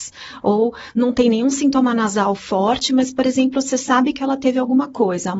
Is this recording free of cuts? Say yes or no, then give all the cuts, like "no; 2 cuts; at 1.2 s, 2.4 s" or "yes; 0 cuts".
yes; 0 cuts